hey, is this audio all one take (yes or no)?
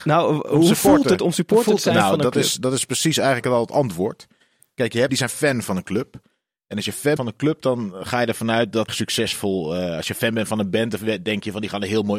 no